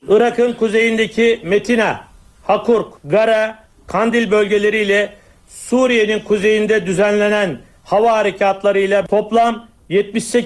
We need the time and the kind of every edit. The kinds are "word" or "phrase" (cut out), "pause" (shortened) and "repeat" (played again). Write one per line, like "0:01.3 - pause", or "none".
0:03.0 - pause